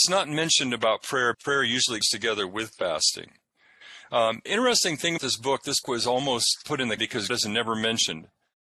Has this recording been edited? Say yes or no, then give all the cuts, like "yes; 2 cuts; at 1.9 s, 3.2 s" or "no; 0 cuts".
yes; 8 cuts; at 1.3 s, 2.0 s, 4.5 s, 5.2 s, 5.8 s, 6.6 s, 7.0 s, 7.3 s